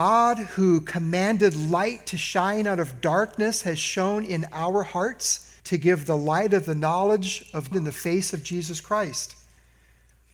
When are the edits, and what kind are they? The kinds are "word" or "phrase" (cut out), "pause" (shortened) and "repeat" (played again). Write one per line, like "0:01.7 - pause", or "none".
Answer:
0:05.6 - pause
0:07.7 - word